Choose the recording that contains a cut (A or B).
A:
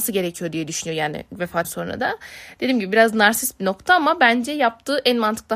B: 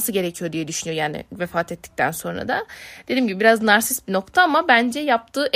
A